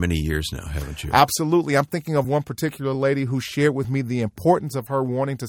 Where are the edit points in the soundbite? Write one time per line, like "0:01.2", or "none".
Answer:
none